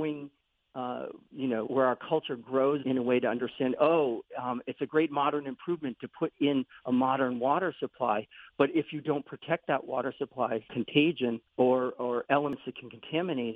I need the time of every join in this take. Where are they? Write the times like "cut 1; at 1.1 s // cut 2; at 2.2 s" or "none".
cut 1; at 1.7 s // cut 2; at 2.8 s // cut 3; at 10.7 s // cut 4; at 11.5 s